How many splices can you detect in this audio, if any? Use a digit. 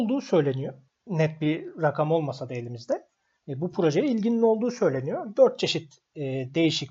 0